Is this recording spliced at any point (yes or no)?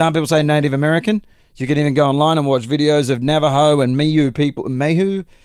no